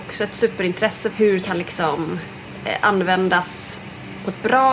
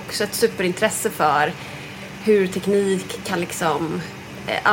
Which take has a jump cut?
first; 2 cuts; at 1.1 s, 1.4 s

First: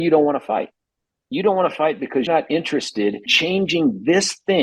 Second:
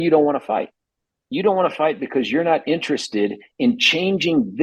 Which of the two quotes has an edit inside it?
first; 2 cuts; at 2.3 s, 3.3 s

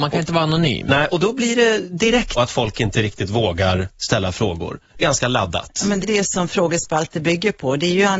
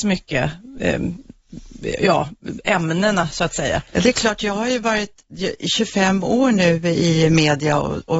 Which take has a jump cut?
first; 3 cuts; at 2.4 s, 5.0 s, 6.0 s

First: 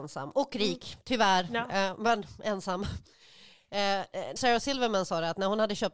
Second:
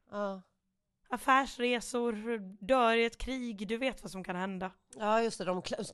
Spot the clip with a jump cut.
first; 1 cut; at 4.4 s

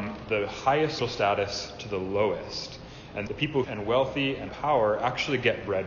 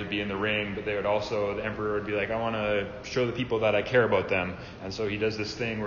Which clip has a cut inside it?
first; 4 cuts; at 1.0 s, 3.3 s, 3.6 s, 4.5 s

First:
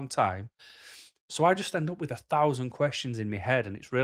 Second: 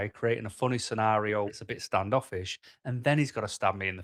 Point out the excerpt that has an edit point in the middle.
second; 1 cut; at 1.5 s

